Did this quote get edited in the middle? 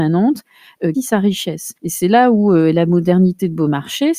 yes; 2 cuts; at 0.9 s, 1.8 s

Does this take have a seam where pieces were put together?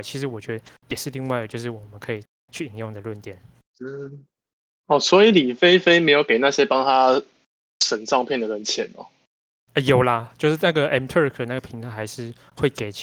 no; 0 cuts

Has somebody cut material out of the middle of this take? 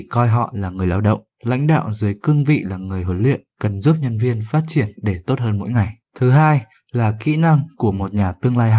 yes; 3 cuts; at 1.3 s, 3.5 s, 6.0 s

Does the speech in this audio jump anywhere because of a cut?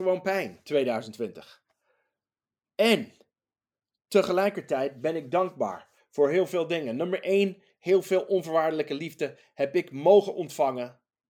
no; 0 cuts

